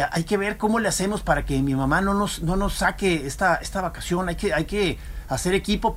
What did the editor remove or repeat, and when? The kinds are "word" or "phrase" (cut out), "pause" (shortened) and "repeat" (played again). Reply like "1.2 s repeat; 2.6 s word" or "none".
none